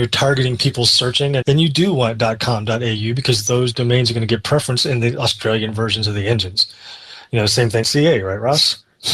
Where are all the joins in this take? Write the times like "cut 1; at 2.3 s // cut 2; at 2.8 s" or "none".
cut 1; at 1.4 s // cut 2; at 7.8 s